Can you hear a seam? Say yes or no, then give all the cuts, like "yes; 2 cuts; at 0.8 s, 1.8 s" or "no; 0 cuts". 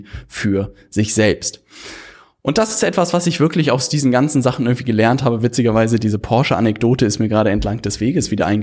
no; 0 cuts